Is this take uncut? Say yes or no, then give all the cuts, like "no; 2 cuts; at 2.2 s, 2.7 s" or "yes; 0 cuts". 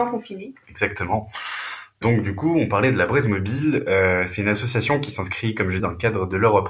no; 1 cut; at 5.8 s